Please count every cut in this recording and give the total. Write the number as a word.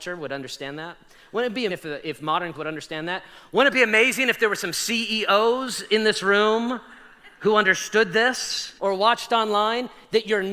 three